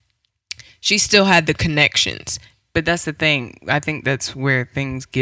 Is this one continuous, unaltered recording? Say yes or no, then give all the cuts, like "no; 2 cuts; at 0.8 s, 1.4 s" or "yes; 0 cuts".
yes; 0 cuts